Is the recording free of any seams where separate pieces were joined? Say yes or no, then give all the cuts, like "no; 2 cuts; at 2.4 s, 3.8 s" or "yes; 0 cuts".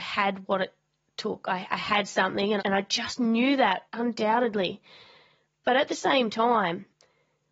no; 2 cuts; at 2.6 s, 3.9 s